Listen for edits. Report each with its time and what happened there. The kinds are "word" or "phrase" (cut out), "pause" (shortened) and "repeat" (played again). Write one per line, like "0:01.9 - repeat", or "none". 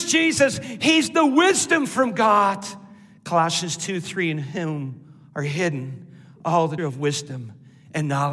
0:06.8 - word